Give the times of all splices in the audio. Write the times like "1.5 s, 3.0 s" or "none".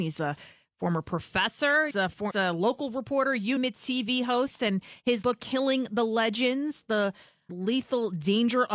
1.9 s, 2.3 s, 3.6 s, 5.2 s, 7.5 s